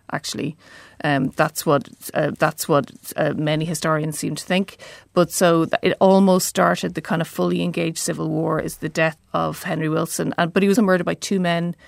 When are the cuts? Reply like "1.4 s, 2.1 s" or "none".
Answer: 2.3 s, 9.2 s, 10.8 s